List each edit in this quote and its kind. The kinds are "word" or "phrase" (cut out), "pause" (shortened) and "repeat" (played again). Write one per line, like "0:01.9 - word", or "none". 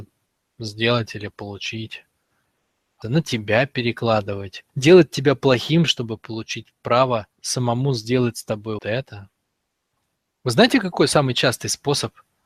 0:03.0 - phrase
0:04.7 - pause
0:07.3 - pause
0:08.8 - word

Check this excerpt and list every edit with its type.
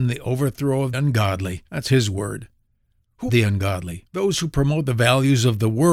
0:00.9 - word
0:01.7 - pause
0:03.3 - word
0:04.1 - pause

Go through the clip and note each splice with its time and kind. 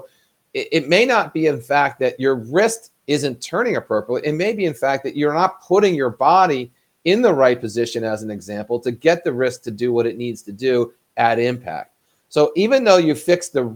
none

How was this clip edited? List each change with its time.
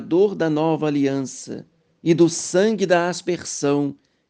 0:01.9 - pause

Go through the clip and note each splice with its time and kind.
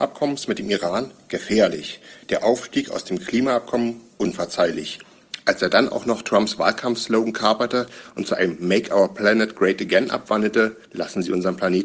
0:10.8 - pause

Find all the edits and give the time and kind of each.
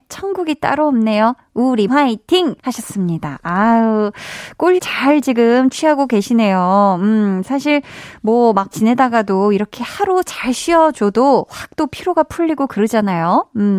0:01.9 - word
0:02.6 - pause
0:04.8 - word
0:08.7 - word

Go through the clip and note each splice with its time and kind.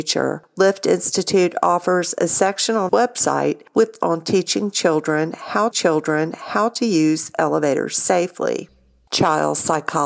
0:02.9 - word
0:04.0 - word
0:05.7 - repeat

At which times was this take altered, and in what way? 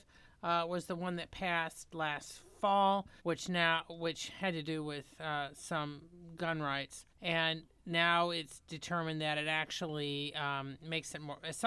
0:03.2 - pause
0:07.1 - pause

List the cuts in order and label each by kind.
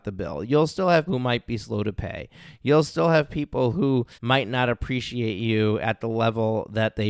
0:01.1 - word
0:04.1 - pause

